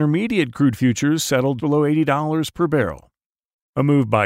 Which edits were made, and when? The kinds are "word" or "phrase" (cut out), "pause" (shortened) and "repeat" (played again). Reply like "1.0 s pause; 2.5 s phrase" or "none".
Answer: 1.6 s word